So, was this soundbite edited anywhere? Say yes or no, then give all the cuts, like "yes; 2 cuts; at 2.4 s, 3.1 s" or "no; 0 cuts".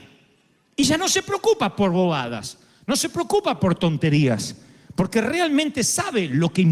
no; 0 cuts